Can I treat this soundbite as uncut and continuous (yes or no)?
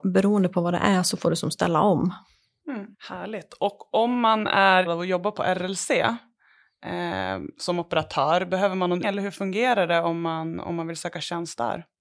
no